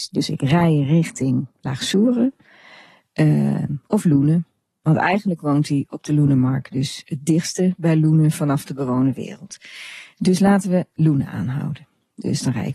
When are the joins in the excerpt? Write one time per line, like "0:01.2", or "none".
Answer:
none